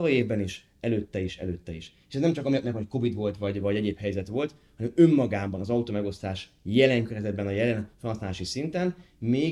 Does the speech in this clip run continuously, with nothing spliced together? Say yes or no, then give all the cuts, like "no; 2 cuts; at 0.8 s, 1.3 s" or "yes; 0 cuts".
yes; 0 cuts